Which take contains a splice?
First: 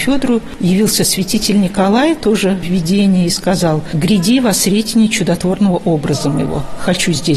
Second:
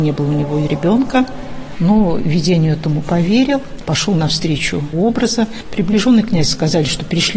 second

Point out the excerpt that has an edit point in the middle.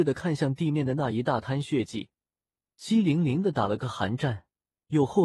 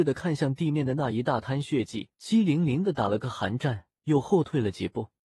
second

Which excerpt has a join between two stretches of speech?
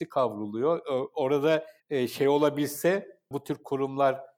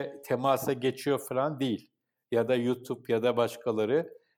first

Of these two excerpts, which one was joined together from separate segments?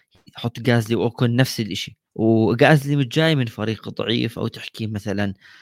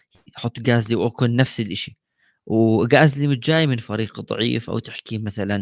first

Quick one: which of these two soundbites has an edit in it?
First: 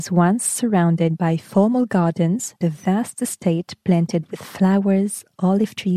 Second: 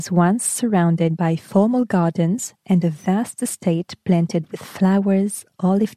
first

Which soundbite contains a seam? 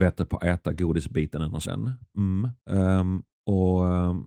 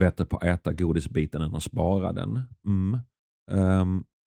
first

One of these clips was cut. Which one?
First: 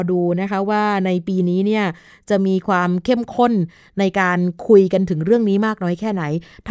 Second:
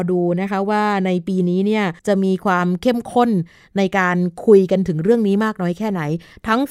second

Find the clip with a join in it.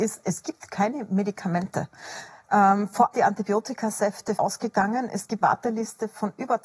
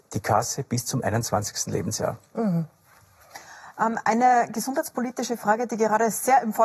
first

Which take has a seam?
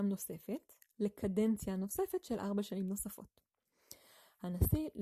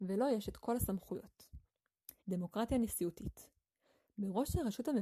second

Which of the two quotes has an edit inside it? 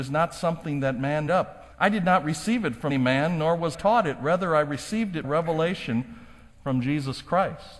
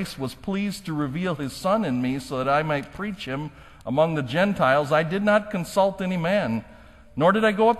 first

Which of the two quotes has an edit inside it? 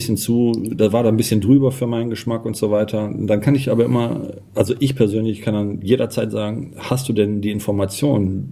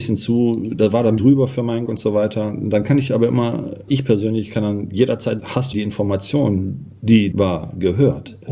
second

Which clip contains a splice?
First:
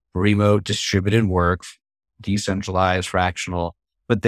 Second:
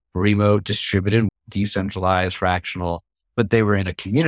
second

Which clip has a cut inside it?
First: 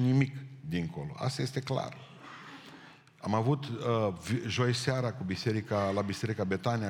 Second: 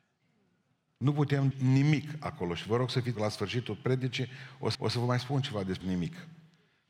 second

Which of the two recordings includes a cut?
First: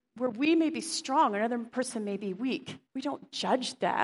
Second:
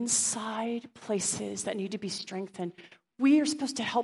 first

